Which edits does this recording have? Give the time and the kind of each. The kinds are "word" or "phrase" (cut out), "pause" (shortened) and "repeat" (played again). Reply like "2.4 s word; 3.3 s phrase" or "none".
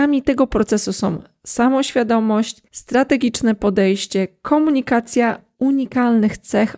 2.7 s pause